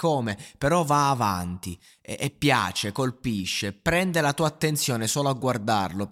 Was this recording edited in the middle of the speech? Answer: no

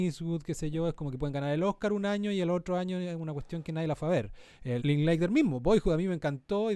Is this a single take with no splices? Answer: no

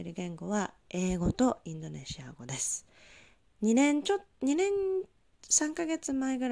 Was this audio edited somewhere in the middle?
no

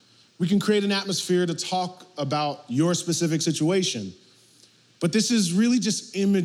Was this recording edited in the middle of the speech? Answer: no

